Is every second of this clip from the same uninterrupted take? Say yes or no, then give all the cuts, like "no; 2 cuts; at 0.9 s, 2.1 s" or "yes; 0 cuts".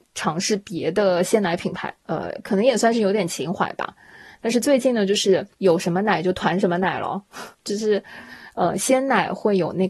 no; 3 cuts; at 2.0 s, 5.5 s, 7.5 s